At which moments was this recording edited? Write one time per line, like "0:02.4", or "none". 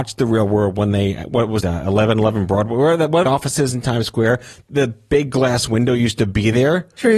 0:01.6
0:03.3